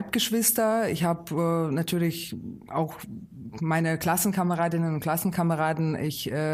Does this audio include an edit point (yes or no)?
no